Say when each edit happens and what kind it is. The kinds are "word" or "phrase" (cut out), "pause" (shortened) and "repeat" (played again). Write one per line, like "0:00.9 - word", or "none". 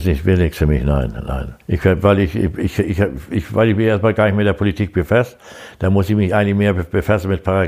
0:01.6 - pause